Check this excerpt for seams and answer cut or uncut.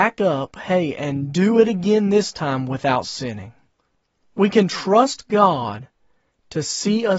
uncut